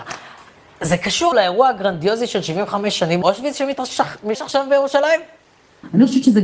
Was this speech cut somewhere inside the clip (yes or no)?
yes